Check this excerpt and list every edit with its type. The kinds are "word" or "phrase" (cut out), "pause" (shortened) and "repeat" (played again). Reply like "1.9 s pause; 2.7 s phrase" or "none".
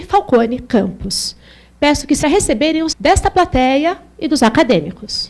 2.2 s phrase; 2.9 s word